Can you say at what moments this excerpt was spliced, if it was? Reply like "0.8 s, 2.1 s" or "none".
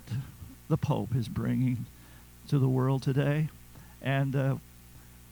none